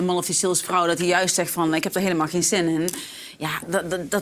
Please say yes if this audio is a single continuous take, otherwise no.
yes